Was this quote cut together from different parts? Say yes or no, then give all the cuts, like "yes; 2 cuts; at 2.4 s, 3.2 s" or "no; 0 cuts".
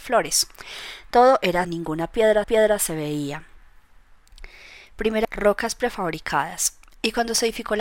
yes; 3 cuts; at 1.6 s, 2.4 s, 5.2 s